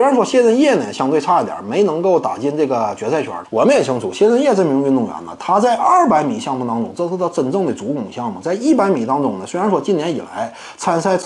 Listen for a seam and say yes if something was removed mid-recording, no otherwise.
yes